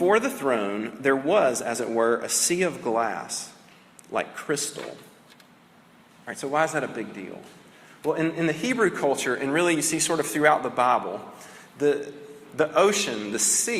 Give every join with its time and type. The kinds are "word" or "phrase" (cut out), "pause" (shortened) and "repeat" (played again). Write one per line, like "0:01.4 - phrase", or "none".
none